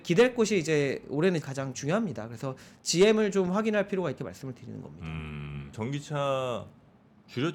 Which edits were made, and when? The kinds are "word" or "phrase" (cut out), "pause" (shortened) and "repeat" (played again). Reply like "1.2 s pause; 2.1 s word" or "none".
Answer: 1.4 s word; 4.2 s word; 5.7 s word